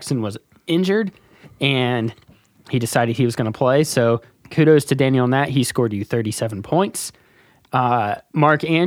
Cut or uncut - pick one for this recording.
uncut